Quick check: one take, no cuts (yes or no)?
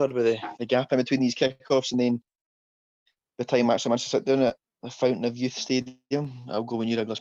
yes